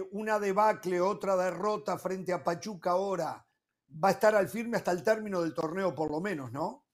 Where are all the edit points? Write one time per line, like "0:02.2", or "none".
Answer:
0:03.9